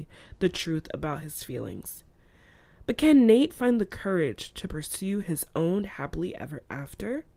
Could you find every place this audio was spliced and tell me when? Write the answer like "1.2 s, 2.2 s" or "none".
none